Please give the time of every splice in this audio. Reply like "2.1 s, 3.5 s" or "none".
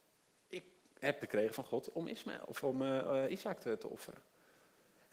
1.2 s